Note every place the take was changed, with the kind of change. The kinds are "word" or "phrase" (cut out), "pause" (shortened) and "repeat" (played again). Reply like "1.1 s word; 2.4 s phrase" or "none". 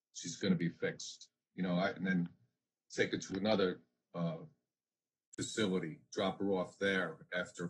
none